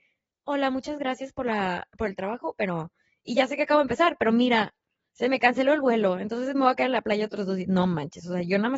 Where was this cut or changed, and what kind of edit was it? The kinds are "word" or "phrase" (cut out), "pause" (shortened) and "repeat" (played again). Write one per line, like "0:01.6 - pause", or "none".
none